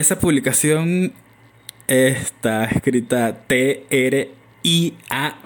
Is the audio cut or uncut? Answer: uncut